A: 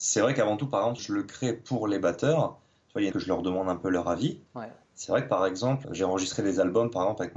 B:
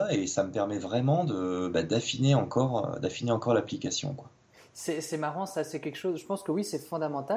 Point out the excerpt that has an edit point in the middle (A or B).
A